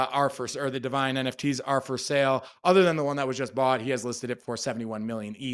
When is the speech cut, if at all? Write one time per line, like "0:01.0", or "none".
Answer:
none